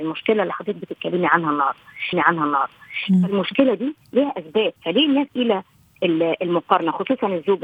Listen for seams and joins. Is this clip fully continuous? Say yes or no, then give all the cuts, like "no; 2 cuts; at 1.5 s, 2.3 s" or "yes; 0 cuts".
no; 4 cuts; at 2.1 s, 4.0 s, 4.8 s, 5.3 s